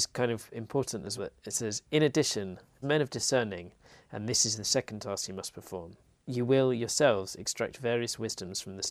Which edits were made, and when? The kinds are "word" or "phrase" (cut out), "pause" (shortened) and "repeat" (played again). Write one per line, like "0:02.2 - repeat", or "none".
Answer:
0:01.2 - word
0:02.8 - word